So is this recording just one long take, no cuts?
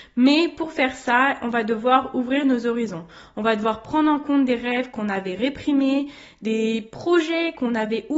yes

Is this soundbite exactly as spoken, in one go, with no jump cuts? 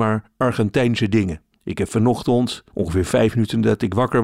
no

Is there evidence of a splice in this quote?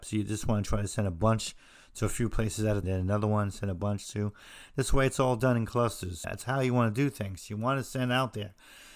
yes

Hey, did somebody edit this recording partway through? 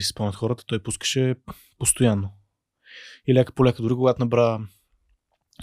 no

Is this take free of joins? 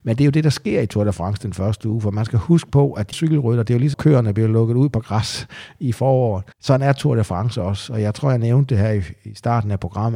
no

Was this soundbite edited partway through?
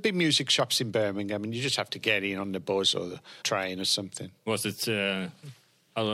yes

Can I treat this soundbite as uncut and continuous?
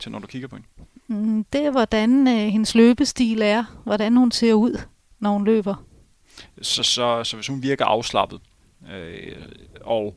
yes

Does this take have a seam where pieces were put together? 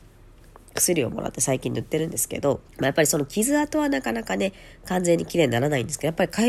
yes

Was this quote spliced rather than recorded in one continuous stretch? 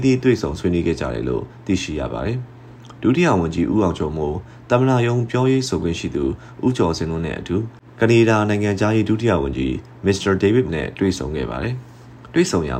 yes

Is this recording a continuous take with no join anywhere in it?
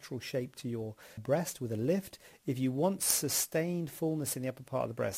no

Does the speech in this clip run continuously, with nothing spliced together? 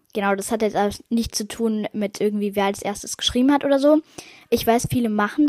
no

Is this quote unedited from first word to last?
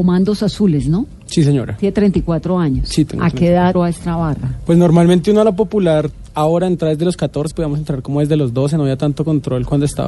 no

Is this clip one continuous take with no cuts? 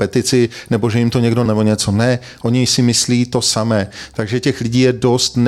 no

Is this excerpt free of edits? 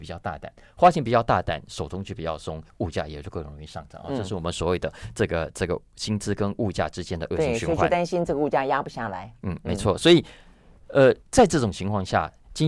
no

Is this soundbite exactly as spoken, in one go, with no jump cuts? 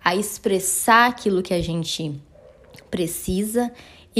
yes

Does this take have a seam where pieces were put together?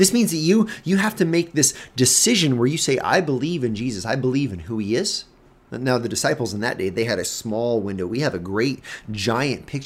no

